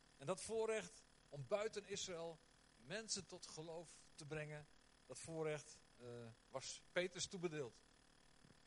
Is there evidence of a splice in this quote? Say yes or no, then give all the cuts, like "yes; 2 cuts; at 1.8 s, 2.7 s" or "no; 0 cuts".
no; 0 cuts